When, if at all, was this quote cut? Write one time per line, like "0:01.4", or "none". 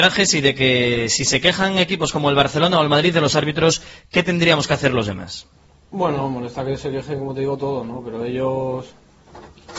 none